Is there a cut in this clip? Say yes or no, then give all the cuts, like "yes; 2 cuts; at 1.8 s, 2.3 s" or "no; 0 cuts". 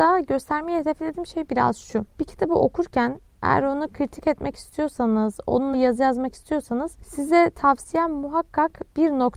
yes; 1 cut; at 5.7 s